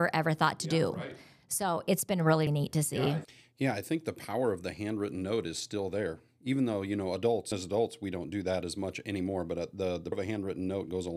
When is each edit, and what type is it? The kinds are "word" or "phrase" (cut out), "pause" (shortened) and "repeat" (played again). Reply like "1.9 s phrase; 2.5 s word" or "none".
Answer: 2.5 s word; 7.5 s word; 10.1 s word